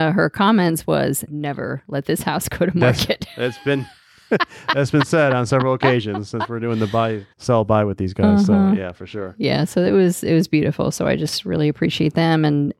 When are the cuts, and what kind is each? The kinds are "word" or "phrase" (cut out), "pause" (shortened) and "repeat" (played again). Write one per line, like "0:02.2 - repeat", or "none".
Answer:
0:01.3 - phrase
0:07.3 - pause